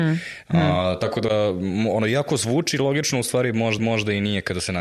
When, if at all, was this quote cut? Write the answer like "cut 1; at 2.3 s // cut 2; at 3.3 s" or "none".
cut 1; at 3.8 s

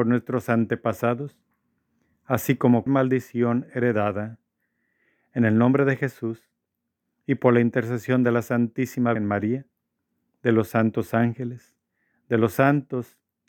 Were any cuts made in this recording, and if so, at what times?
cut 1; at 2.9 s // cut 2; at 9.2 s

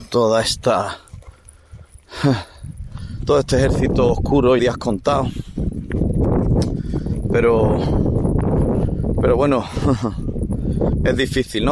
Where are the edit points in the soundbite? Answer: cut 1; at 4.6 s

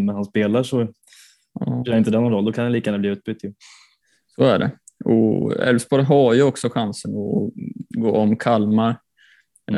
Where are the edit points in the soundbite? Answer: none

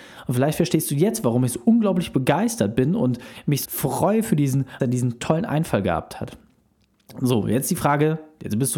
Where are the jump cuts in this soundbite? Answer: cut 1; at 3.6 s // cut 2; at 4.8 s

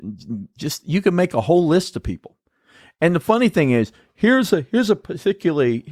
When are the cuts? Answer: none

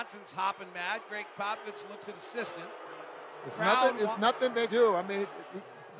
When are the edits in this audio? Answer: cut 1; at 2.1 s // cut 2; at 4.7 s

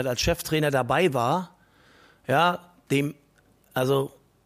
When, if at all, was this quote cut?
none

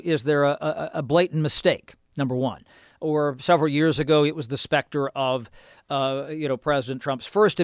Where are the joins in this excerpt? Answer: none

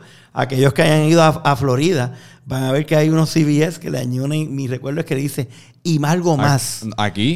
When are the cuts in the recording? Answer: none

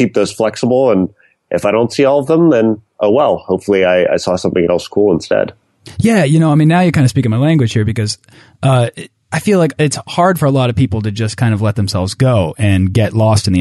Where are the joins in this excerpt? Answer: none

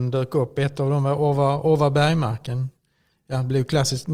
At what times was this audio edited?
none

